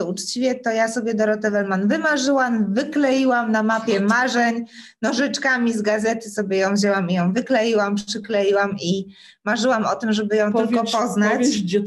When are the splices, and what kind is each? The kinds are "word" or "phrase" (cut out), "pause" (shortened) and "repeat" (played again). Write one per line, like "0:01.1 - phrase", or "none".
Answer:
none